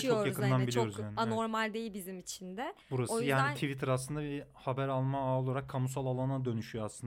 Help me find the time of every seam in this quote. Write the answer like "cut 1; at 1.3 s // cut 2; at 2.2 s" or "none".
cut 1; at 2.8 s